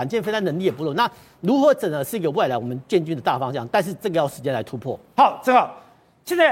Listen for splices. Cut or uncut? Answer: uncut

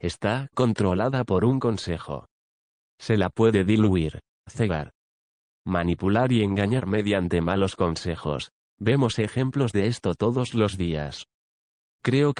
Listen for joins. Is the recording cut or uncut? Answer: uncut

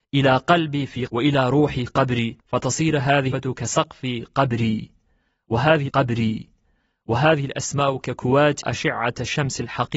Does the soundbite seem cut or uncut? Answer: cut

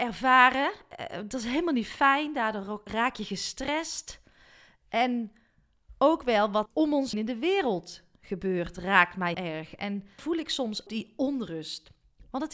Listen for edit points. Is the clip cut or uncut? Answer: cut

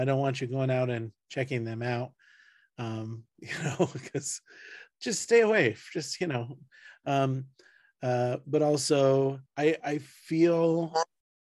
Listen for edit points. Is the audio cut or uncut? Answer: cut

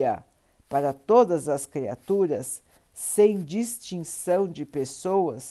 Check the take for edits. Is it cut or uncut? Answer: uncut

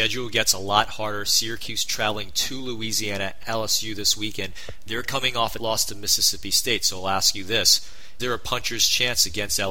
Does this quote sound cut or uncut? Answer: cut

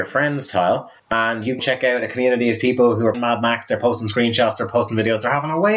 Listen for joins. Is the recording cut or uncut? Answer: cut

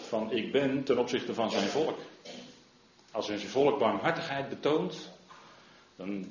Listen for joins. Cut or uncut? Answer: uncut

